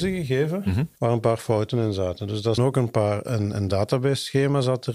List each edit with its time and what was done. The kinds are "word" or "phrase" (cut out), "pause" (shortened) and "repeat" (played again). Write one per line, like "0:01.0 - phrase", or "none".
0:01.0 - pause
0:02.6 - phrase